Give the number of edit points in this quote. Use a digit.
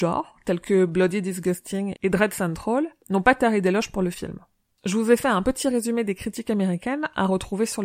0